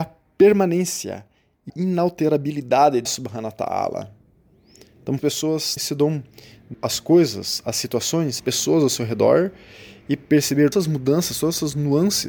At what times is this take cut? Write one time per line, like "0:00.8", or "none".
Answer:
0:01.7
0:03.0
0:05.2
0:05.8
0:06.7
0:08.4
0:10.7